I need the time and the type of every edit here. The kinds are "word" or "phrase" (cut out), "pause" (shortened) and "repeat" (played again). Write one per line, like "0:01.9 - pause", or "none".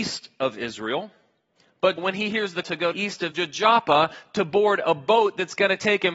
0:02.0 - word
0:02.6 - word
0:02.9 - phrase
0:03.3 - phrase